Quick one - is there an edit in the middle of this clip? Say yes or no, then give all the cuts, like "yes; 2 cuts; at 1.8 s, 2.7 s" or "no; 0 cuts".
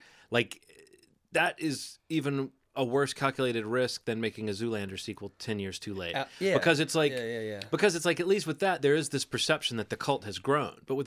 no; 0 cuts